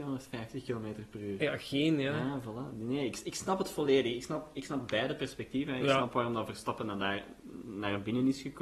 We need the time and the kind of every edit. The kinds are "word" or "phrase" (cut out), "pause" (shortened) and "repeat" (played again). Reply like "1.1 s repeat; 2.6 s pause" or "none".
none